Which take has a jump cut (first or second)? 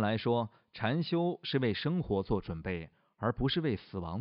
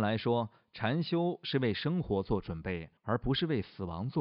second